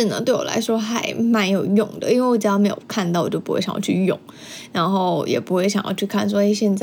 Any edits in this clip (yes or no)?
no